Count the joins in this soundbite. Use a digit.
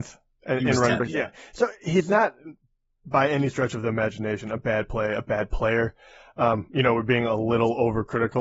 0